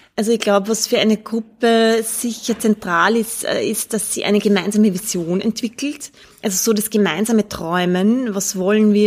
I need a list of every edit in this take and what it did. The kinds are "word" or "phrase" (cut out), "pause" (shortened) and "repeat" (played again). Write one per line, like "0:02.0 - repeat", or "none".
none